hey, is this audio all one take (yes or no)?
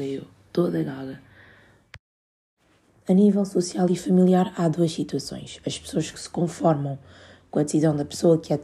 yes